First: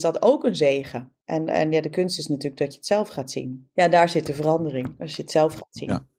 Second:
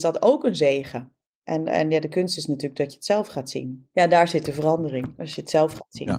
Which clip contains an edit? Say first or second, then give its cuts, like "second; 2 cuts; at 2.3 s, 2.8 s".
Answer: first; 1 cut; at 1.2 s